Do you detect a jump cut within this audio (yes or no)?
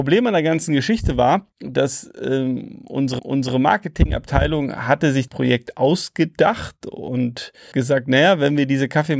yes